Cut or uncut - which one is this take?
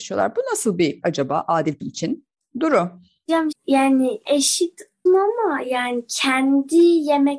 cut